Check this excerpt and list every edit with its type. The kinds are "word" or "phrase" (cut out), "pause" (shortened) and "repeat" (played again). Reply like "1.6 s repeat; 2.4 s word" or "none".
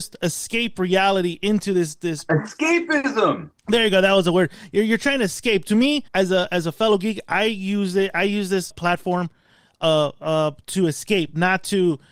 3.6 s pause; 6.1 s pause; 8.7 s word